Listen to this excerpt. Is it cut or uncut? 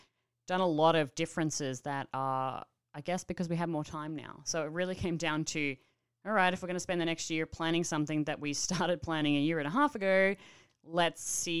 uncut